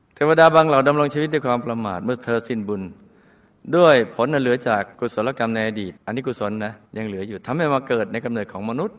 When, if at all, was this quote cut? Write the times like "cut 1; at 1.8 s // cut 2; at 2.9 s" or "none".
cut 1; at 4.9 s // cut 2; at 6.0 s // cut 3; at 6.9 s